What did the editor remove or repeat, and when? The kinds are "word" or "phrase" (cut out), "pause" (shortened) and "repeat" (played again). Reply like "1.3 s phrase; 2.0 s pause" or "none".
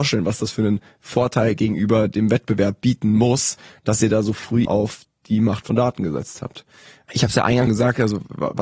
4.6 s word; 7.7 s word